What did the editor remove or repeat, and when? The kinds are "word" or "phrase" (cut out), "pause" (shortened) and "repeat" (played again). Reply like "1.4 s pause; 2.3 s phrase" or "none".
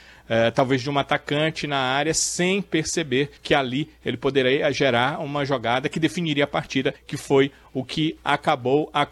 3.4 s pause; 7.0 s pause